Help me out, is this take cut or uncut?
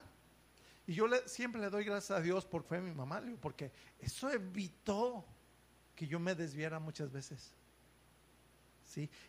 cut